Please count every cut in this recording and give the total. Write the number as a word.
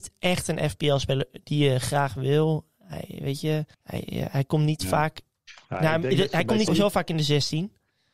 two